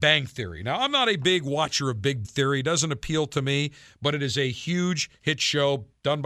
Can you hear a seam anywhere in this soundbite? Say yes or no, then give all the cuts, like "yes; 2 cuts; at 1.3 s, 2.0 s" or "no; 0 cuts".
yes; 1 cut; at 2.2 s